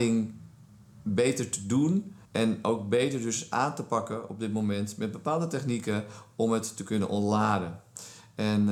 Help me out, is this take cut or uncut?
cut